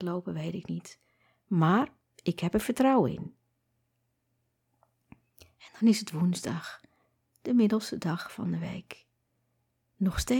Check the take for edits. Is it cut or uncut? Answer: uncut